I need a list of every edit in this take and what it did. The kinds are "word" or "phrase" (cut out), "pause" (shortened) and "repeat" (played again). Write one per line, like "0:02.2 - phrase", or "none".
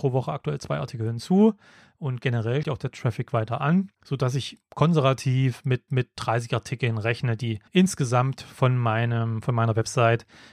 0:02.6 - word
0:03.9 - pause
0:04.6 - word
0:05.9 - repeat
0:07.7 - pause